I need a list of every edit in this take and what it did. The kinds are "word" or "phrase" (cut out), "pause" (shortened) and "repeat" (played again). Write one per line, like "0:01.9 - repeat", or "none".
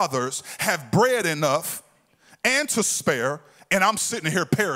none